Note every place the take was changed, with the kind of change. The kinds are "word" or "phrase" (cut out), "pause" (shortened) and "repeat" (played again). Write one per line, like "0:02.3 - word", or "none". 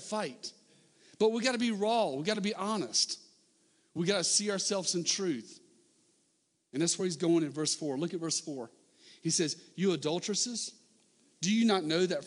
none